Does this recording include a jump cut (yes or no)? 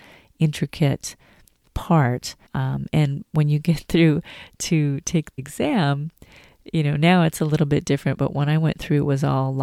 yes